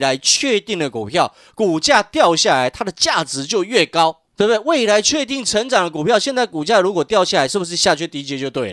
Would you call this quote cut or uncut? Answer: cut